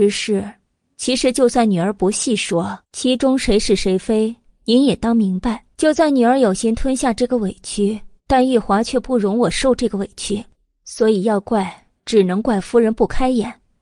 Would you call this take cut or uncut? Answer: cut